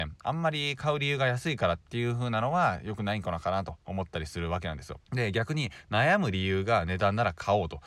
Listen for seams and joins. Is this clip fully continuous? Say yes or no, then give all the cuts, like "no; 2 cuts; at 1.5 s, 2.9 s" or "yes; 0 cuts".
no; 2 cuts; at 1.8 s, 5.0 s